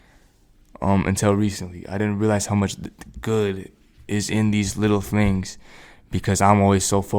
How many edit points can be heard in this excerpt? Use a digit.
0